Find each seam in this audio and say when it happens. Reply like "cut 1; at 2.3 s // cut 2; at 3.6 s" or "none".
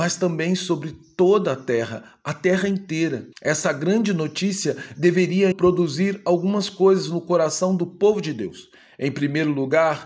cut 1; at 3.3 s // cut 2; at 5.5 s